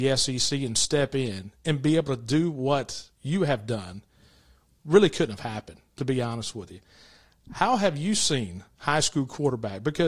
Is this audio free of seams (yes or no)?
no